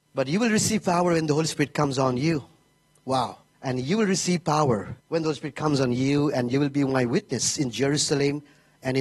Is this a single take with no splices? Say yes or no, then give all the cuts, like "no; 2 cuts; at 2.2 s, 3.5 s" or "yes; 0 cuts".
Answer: no; 2 cuts; at 3.5 s, 5.0 s